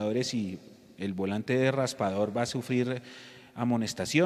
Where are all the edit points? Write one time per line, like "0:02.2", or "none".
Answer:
none